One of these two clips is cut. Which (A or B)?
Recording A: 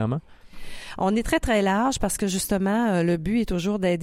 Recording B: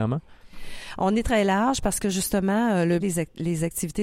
B